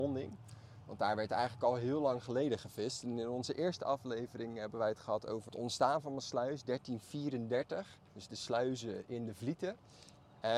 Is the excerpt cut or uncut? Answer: cut